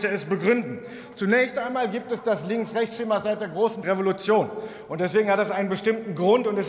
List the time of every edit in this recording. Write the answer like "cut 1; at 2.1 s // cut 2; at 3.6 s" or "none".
cut 1; at 3.8 s